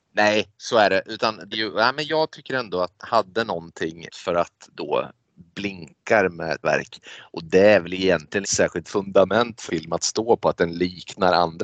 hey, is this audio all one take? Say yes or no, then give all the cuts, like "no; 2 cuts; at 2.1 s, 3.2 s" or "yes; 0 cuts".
no; 9 cuts; at 1.5 s, 2.1 s, 3.0 s, 4.1 s, 4.7 s, 6.6 s, 8.4 s, 8.8 s, 9.7 s